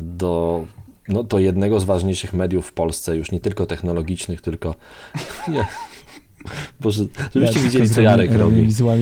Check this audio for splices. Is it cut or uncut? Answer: uncut